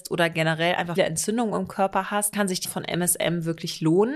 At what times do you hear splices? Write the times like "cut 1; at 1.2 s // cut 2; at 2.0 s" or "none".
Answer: cut 1; at 1.0 s // cut 2; at 2.3 s // cut 3; at 2.6 s

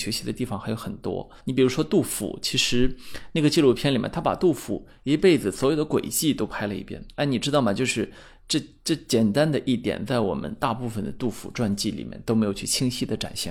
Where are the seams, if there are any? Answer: cut 1; at 1.4 s

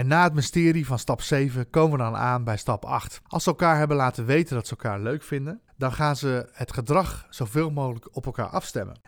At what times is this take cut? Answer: cut 1; at 3.3 s // cut 2; at 5.7 s

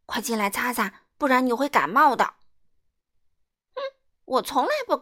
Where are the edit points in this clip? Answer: none

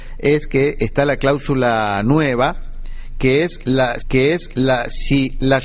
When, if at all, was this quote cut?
cut 1; at 4.0 s

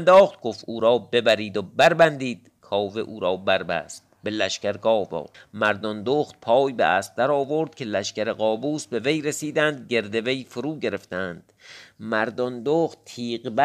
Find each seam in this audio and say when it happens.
cut 1; at 5.3 s

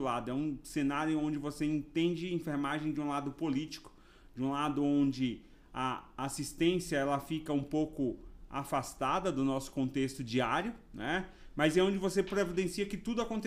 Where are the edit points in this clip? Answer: none

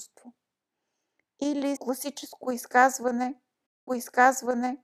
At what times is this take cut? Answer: cut 1; at 1.8 s // cut 2; at 3.9 s

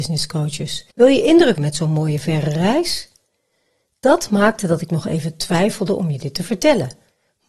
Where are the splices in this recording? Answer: cut 1; at 0.9 s // cut 2; at 1.5 s

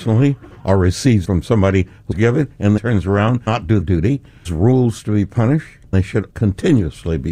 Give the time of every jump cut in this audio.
cut 1; at 1.2 s // cut 2; at 2.1 s // cut 3; at 2.8 s // cut 4; at 3.5 s // cut 5; at 3.8 s // cut 6; at 4.4 s // cut 7; at 5.9 s // cut 8; at 6.3 s

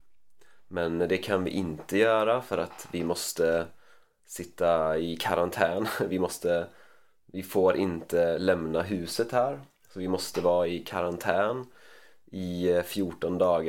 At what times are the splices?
none

